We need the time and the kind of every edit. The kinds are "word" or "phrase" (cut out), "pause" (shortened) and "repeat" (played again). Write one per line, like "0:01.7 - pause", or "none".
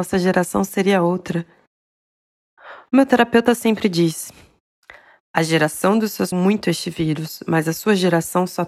0:06.3 - phrase